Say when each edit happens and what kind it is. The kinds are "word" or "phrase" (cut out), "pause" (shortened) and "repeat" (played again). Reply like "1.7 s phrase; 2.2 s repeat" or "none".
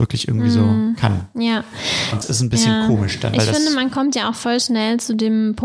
2.2 s word